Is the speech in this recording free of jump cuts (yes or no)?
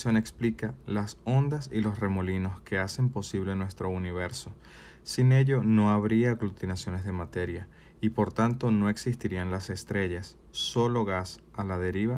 yes